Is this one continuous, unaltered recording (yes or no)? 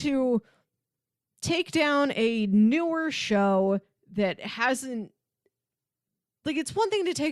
yes